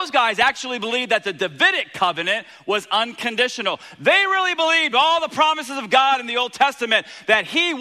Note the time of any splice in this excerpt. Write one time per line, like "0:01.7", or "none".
none